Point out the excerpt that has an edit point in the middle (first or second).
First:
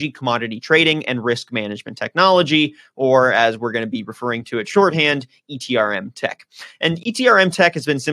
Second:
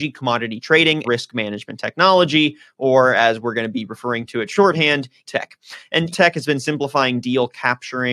second